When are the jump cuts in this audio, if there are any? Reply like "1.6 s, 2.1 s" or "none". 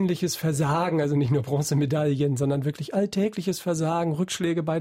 none